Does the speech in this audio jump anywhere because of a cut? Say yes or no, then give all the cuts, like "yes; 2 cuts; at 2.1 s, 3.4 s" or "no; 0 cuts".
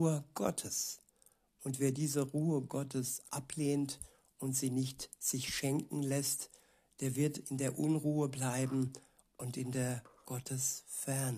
no; 0 cuts